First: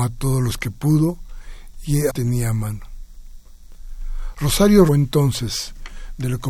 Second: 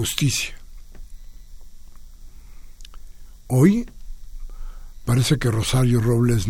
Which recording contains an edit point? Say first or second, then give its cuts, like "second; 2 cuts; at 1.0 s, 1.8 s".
first; 2 cuts; at 2.1 s, 4.9 s